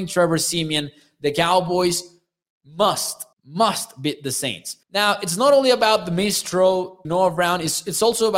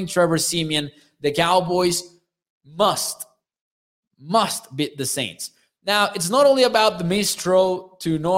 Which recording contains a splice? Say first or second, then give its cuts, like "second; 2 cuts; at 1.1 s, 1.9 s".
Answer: first; 3 cuts; at 3.3 s, 4.8 s, 7.0 s